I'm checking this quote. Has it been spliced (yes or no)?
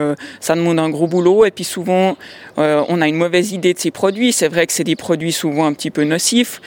no